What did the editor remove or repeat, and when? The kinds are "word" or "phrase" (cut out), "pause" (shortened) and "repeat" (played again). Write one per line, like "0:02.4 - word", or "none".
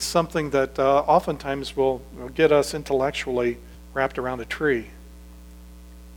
0:03.7 - pause

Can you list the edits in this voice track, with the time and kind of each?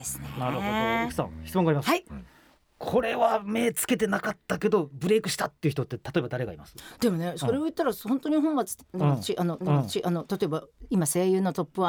0:09.6 - repeat

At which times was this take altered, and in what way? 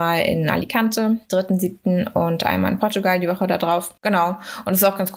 0:04.0 - pause

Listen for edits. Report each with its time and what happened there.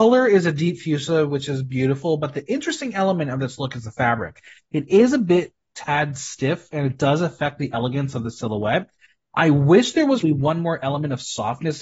0:10.2 - word

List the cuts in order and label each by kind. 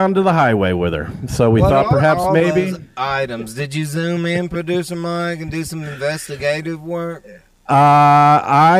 none

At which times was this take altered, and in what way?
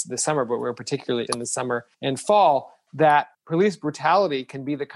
0:01.3 - word
0:01.9 - pause
0:03.3 - pause

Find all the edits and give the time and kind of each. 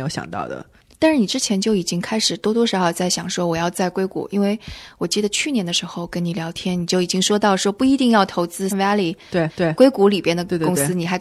0:08.7 - word
0:09.5 - repeat

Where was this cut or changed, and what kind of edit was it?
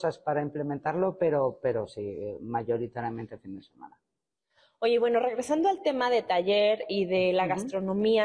none

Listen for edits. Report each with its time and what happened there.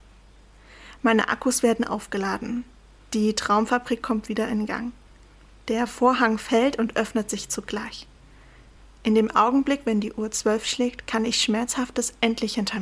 none

